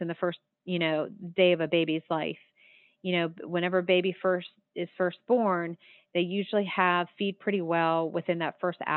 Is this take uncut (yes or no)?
yes